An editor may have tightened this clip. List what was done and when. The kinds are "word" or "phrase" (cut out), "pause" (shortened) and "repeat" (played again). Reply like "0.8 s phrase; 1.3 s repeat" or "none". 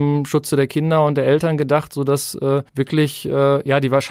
2.7 s pause

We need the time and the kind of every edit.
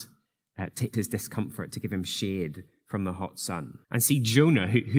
0.9 s word; 3.8 s pause

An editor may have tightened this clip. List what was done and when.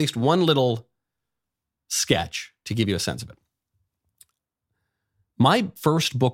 none

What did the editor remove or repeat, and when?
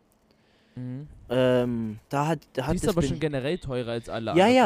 2.0 s pause; 2.5 s pause

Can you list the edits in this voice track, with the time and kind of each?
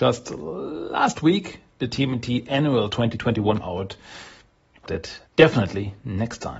1.7 s pause; 3.6 s word; 4.9 s phrase; 5.3 s pause

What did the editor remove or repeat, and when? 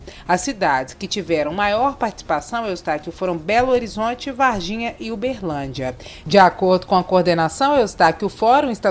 none

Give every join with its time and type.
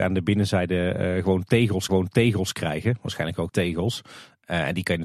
1.9 s repeat; 3.5 s word

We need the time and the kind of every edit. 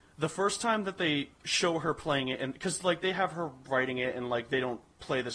none

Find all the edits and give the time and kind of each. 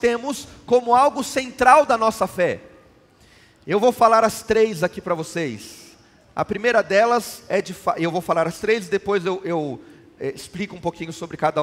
none

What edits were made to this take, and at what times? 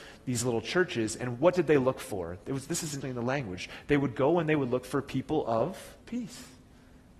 3.0 s word; 6.0 s pause

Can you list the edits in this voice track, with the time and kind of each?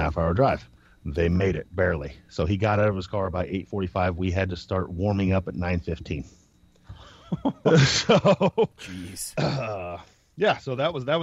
none

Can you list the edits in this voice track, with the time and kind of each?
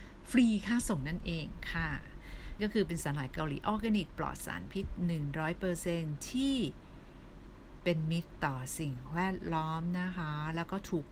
2.6 s phrase

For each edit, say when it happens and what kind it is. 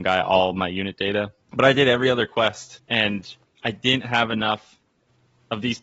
2.8 s pause

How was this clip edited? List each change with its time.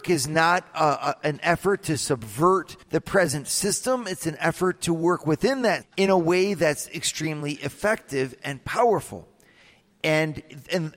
2.8 s pause; 5.8 s word

